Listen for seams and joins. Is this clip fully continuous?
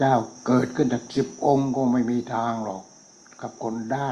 yes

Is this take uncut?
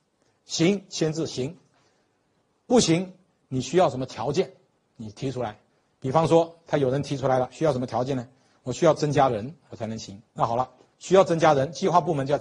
no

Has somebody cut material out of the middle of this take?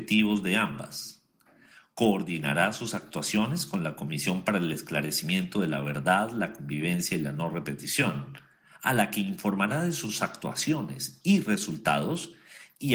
no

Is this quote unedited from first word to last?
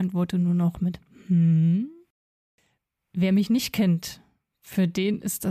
yes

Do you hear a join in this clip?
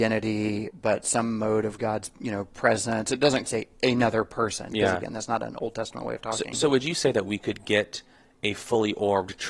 yes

